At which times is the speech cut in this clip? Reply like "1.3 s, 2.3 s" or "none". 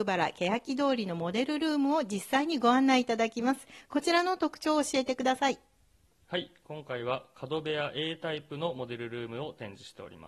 none